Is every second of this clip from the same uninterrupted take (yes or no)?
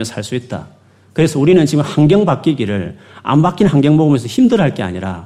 yes